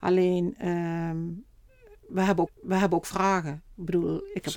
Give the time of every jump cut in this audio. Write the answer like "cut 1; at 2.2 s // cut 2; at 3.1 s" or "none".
cut 1; at 2.5 s